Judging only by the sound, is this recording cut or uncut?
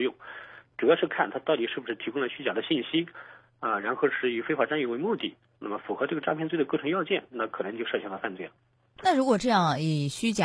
uncut